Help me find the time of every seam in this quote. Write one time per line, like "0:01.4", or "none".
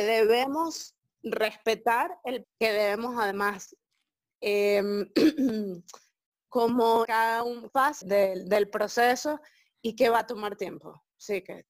0:02.4
0:07.0
0:07.7
0:08.0